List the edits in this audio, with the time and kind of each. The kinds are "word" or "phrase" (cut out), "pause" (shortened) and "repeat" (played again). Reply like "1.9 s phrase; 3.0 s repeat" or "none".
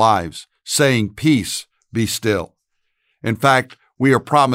none